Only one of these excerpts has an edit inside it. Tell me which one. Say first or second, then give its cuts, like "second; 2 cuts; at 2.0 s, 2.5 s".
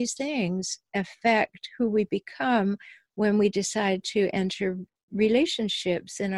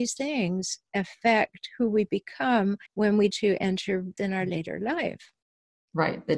second; 3 cuts; at 2.9 s, 3.3 s, 4.2 s